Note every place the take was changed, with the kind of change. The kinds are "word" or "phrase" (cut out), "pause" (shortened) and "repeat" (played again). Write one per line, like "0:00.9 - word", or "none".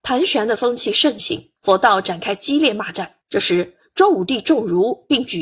0:01.6 - pause
0:03.2 - pause